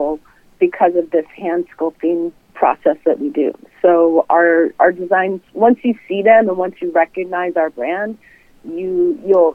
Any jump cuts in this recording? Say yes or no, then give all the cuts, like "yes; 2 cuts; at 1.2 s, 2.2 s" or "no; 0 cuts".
no; 0 cuts